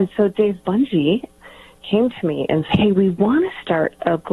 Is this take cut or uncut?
cut